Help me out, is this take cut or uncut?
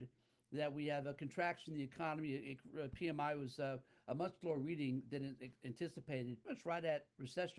cut